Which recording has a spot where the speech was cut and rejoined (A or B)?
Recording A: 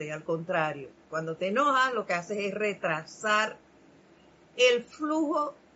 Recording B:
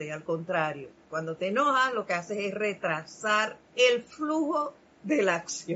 B